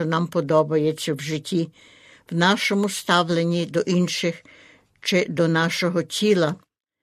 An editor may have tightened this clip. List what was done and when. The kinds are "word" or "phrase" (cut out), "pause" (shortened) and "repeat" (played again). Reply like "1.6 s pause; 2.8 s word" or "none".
none